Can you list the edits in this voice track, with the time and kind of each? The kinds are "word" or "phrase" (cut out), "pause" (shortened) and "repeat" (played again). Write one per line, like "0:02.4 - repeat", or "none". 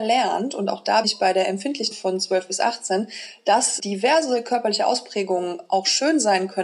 0:01.0 - word
0:01.9 - word
0:03.8 - word